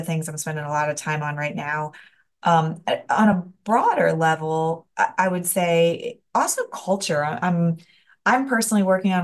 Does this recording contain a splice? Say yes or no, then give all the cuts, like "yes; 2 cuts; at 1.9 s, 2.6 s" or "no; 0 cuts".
no; 0 cuts